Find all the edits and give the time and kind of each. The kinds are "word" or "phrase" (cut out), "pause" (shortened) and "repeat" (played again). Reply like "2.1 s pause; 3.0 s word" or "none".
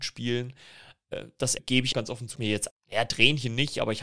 1.6 s word; 1.9 s word; 2.3 s word; 2.7 s phrase